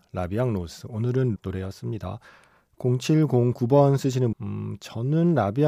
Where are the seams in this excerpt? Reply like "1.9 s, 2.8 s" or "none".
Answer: 1.4 s, 4.3 s